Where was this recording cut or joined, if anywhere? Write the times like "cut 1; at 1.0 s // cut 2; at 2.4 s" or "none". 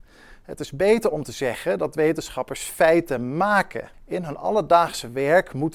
cut 1; at 3.9 s